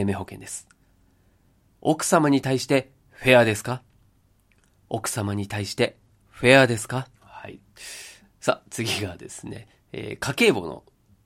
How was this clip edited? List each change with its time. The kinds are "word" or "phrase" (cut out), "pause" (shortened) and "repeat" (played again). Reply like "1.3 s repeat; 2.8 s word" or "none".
7.1 s pause